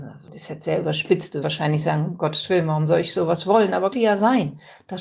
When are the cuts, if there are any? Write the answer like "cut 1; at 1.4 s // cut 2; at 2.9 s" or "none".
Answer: cut 1; at 1.4 s // cut 2; at 3.9 s